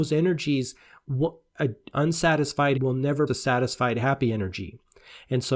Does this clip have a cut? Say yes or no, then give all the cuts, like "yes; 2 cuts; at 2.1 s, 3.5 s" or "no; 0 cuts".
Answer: yes; 3 cuts; at 1.9 s, 2.7 s, 3.3 s